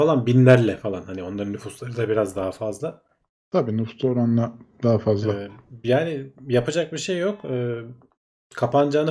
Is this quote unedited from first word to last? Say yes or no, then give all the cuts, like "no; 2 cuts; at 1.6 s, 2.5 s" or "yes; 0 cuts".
yes; 0 cuts